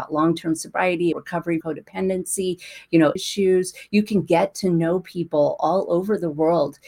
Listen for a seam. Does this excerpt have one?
yes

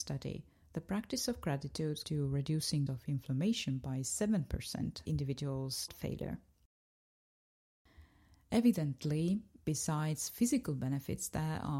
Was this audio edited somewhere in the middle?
yes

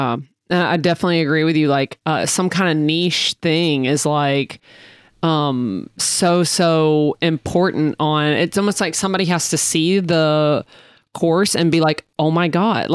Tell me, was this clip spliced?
no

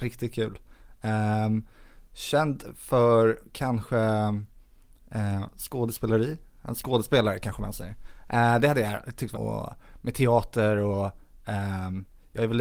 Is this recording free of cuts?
no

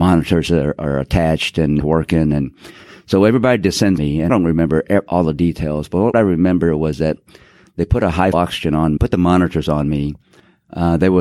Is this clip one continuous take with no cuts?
no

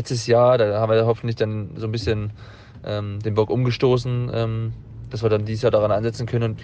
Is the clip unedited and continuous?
yes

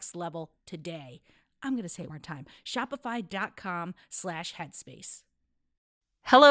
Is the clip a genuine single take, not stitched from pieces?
no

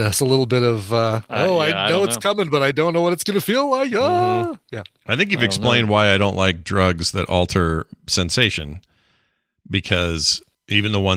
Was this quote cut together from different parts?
no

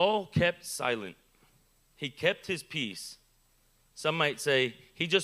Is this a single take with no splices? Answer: yes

